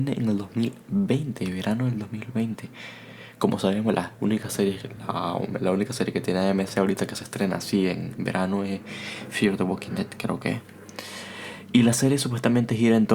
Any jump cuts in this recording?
no; 0 cuts

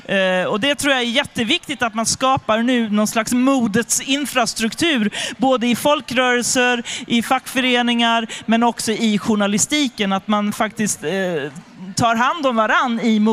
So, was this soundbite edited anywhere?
no; 0 cuts

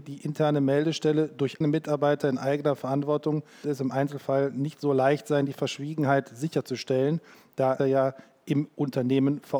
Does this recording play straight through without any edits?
no; 3 cuts; at 1.6 s, 3.6 s, 7.8 s

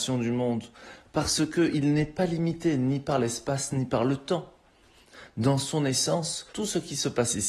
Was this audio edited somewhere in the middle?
yes; 1 cut; at 6.5 s

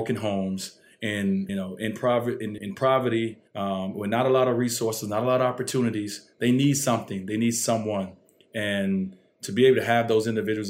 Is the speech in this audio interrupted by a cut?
yes; 3 cuts; at 1.5 s, 2.6 s, 3.5 s

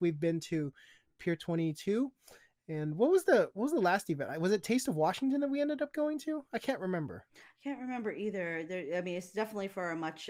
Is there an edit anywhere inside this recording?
no; 0 cuts

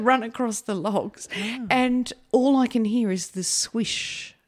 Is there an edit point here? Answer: no; 0 cuts

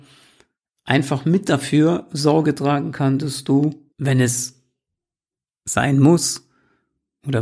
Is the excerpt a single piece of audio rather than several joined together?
no; 1 cut; at 3.9 s

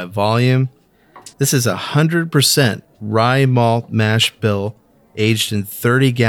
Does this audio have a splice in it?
yes; 1 cut; at 1.3 s

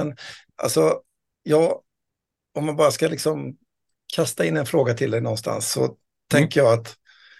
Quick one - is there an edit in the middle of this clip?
no; 0 cuts

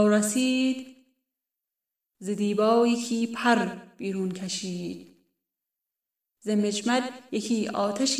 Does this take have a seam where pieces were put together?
no; 0 cuts

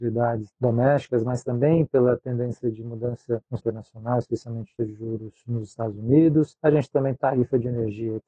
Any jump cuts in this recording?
yes; 3 cuts; at 3.6 s, 4.8 s, 7.2 s

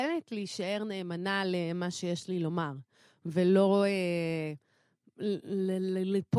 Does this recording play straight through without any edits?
yes; 0 cuts

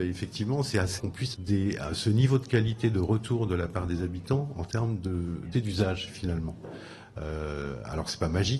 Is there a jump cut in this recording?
yes; 3 cuts; at 1.0 s, 1.3 s, 5.5 s

